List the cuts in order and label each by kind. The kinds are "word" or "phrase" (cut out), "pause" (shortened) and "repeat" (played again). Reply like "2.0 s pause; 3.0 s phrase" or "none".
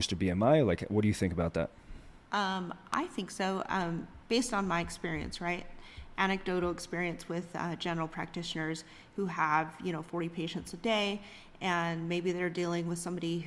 2.3 s pause